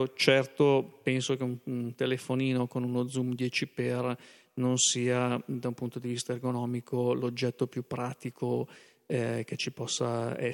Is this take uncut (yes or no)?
yes